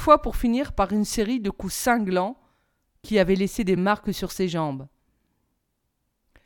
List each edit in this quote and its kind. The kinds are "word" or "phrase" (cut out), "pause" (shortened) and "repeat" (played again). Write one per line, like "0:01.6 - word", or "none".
none